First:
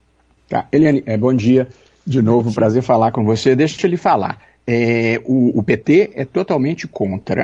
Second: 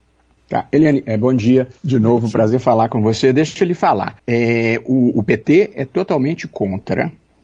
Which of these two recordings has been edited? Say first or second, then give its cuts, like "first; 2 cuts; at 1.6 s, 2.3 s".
second; 2 cuts; at 1.8 s, 4.2 s